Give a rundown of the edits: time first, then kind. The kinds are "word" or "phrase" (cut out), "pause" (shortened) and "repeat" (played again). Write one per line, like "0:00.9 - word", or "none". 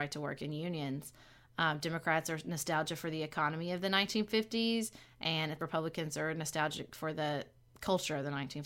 0:05.6 - word